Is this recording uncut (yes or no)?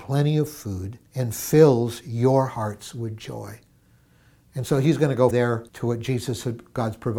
no